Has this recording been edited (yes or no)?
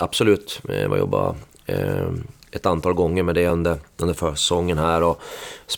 no